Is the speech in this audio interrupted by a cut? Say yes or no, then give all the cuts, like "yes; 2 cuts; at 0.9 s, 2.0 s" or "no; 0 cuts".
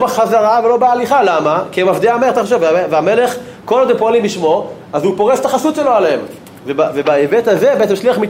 no; 0 cuts